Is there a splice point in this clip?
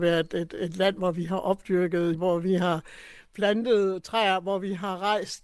yes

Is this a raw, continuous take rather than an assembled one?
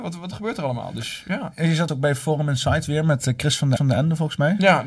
no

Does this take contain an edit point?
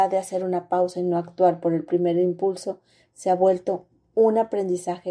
no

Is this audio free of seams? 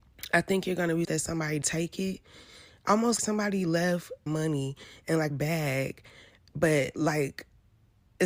no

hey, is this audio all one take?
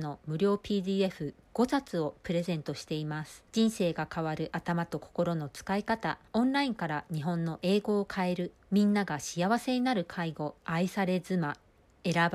no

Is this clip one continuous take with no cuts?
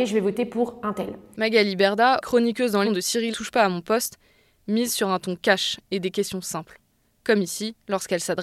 no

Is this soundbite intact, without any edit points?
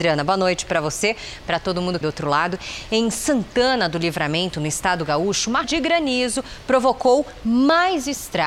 no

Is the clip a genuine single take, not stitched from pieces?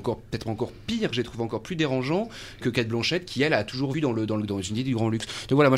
no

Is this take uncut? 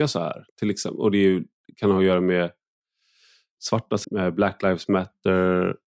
no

